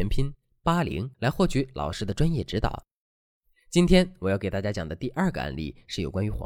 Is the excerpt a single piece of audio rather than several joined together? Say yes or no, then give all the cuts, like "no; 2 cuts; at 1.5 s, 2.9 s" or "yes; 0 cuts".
no; 1 cut; at 1.1 s